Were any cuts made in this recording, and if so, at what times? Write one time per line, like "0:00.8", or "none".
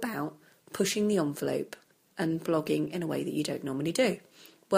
none